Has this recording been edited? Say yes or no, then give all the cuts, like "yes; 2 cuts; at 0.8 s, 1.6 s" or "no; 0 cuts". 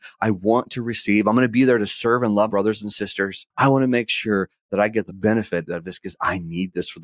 yes; 3 cuts; at 2.5 s, 3.5 s, 5.1 s